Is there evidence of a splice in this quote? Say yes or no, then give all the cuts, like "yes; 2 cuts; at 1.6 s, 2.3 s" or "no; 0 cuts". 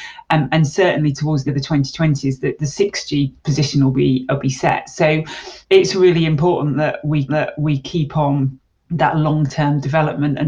yes; 5 cuts; at 1.5 s, 3.4 s, 5.6 s, 7.3 s, 8.7 s